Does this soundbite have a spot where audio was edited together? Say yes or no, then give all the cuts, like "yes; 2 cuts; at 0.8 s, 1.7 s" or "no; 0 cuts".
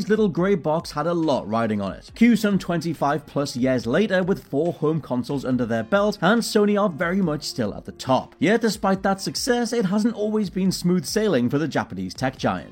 no; 0 cuts